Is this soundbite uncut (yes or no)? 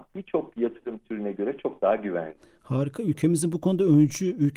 yes